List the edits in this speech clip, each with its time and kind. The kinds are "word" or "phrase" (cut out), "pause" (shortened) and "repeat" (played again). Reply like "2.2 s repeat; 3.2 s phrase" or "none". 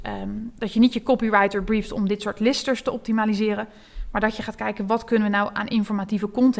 none

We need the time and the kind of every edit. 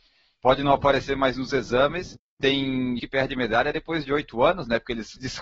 3.0 s word

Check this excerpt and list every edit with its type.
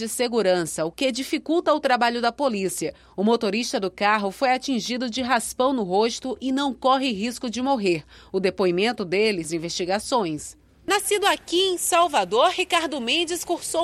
9.4 s phrase

